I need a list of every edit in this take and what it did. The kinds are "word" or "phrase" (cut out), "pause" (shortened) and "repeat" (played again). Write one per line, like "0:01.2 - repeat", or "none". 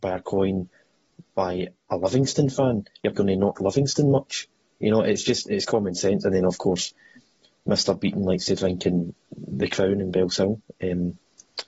0:03.1 - word
0:03.5 - word